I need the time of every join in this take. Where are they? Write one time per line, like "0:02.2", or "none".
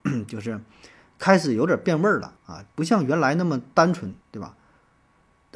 0:02.4
0:04.2